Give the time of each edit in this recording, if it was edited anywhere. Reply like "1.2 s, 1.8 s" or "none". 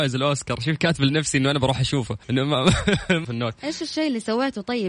2.2 s, 3.2 s